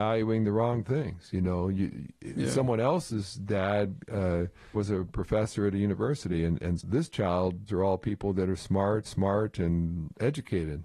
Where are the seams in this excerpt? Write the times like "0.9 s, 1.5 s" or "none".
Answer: 4.7 s, 6.8 s, 7.7 s, 9.0 s